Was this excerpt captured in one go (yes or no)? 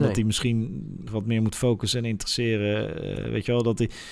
no